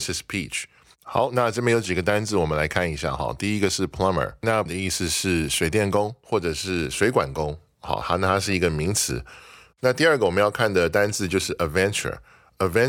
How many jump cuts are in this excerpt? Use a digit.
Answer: 1